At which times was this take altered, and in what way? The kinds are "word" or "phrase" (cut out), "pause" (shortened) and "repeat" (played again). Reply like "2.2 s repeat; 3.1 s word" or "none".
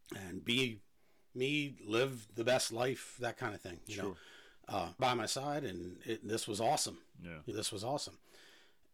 5.0 s phrase; 7.5 s word